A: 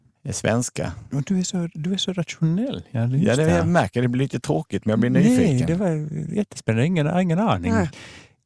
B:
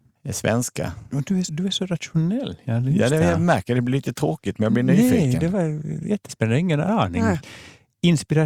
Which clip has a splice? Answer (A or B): B